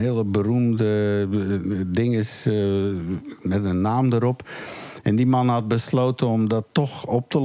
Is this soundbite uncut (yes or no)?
yes